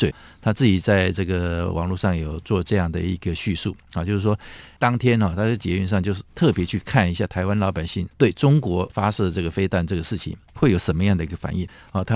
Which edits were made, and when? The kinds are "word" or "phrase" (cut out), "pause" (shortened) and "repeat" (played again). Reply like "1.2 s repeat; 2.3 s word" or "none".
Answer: 8.1 s pause